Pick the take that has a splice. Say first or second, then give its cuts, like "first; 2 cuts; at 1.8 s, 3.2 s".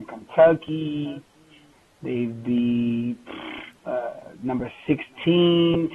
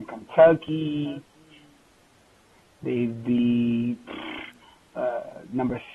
first; 2 cuts; at 1.7 s, 3.8 s